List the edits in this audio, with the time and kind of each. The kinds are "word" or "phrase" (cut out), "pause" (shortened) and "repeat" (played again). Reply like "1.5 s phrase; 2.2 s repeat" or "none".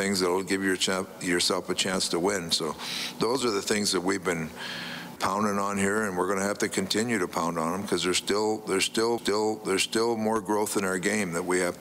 5.2 s word; 9.2 s repeat